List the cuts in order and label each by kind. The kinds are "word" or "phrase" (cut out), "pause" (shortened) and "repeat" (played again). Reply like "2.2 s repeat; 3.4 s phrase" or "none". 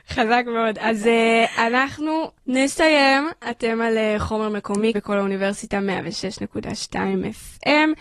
2.4 s pause; 4.9 s word